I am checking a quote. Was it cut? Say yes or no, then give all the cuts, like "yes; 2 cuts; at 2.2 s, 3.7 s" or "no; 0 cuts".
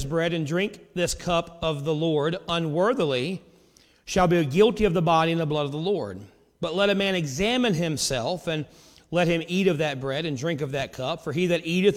no; 0 cuts